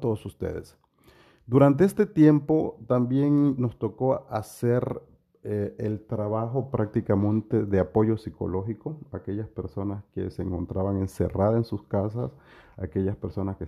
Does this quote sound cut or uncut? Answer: uncut